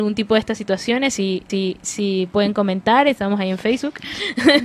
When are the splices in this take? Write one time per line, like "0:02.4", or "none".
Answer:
0:01.5